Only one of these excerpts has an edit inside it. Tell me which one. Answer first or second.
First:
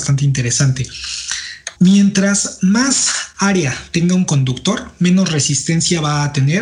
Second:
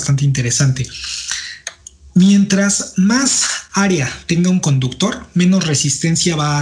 first